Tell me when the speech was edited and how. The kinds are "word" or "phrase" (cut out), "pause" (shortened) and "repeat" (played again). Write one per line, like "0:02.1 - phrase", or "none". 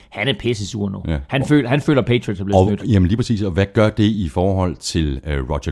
none